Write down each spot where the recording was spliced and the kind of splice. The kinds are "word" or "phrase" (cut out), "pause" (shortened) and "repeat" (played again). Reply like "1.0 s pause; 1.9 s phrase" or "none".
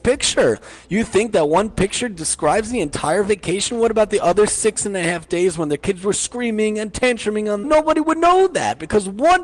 7.6 s phrase